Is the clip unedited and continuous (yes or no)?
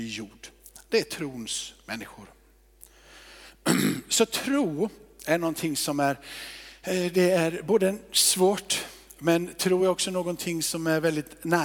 yes